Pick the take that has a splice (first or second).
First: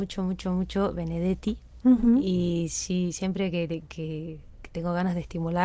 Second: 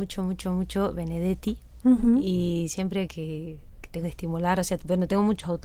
second